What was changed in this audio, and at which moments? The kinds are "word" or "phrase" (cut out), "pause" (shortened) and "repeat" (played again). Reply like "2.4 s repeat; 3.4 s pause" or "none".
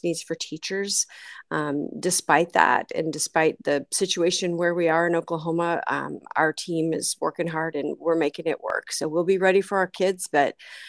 none